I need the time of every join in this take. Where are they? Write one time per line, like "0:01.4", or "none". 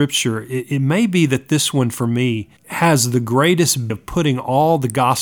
0:02.6
0:03.9